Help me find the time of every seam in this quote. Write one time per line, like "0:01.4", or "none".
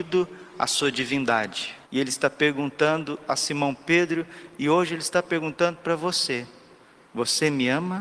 0:01.8